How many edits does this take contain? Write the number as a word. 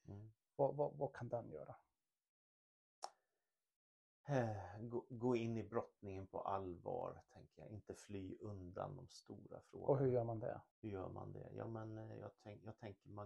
one